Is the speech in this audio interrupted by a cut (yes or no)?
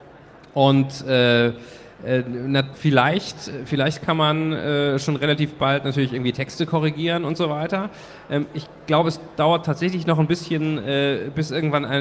yes